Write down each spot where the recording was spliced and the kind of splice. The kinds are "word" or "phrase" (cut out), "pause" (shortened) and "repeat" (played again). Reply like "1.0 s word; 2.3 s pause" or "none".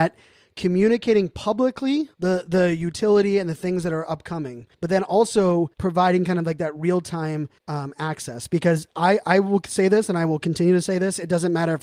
2.1 s pause; 4.7 s pause; 5.7 s pause; 7.6 s pause